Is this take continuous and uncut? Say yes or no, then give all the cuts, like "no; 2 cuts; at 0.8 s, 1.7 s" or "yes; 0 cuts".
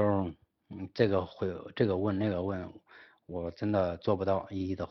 yes; 0 cuts